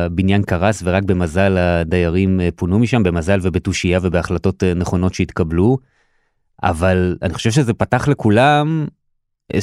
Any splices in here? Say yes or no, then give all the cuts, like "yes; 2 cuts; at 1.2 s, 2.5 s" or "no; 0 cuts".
no; 0 cuts